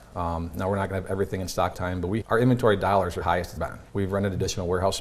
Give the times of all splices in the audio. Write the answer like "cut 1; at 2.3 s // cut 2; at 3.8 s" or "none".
cut 1; at 1.7 s // cut 2; at 2.2 s // cut 3; at 3.2 s // cut 4; at 3.6 s // cut 5; at 3.9 s

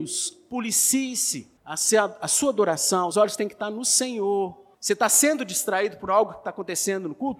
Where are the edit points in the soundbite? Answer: cut 1; at 1.6 s // cut 2; at 3.1 s // cut 3; at 4.7 s

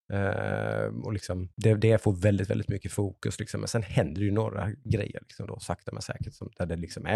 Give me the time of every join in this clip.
cut 1; at 1.5 s

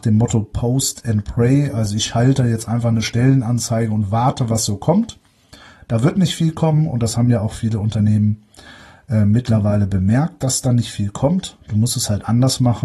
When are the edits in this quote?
none

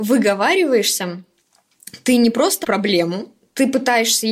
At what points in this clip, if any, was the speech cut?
cut 1; at 2.6 s

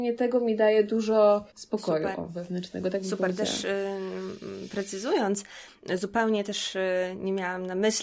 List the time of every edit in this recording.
cut 1; at 1.5 s

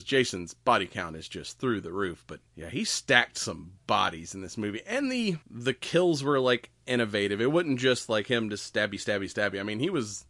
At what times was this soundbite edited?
cut 1; at 2.5 s // cut 2; at 5.4 s

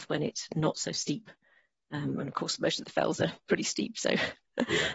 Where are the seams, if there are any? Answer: none

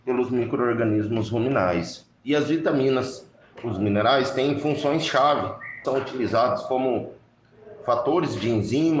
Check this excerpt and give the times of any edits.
cut 1; at 2.2 s // cut 2; at 3.6 s // cut 3; at 5.8 s

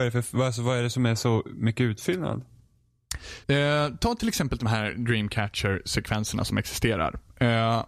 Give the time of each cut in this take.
cut 1; at 3.4 s

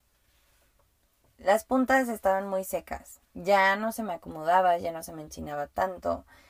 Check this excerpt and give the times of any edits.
cut 1; at 3.2 s

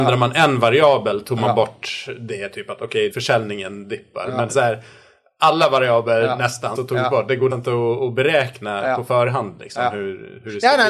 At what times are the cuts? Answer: cut 1; at 3.1 s // cut 2; at 4.5 s // cut 3; at 6.8 s // cut 4; at 7.5 s

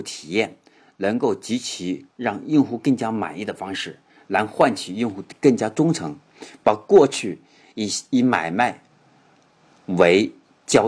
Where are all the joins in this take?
cut 1; at 2.1 s

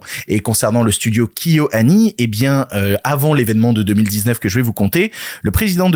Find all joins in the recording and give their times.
none

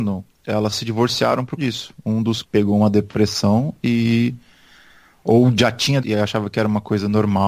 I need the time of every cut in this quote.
cut 1; at 1.6 s // cut 2; at 2.4 s // cut 3; at 6.0 s

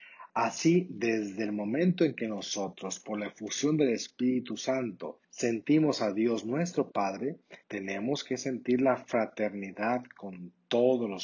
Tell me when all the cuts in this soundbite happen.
cut 1; at 5.2 s // cut 2; at 7.6 s

